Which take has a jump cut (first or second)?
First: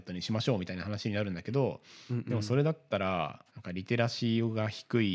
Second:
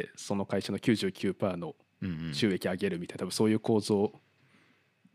first